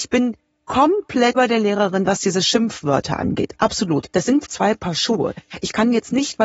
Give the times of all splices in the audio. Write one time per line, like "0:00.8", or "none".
0:01.3
0:04.1
0:04.5